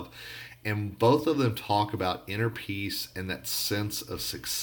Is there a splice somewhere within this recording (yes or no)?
no